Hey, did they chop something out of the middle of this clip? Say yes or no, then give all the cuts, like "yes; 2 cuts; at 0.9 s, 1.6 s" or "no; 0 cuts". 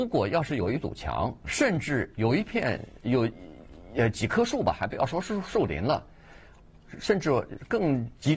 yes; 1 cut; at 1.4 s